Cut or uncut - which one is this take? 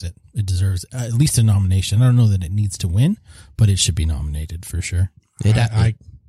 uncut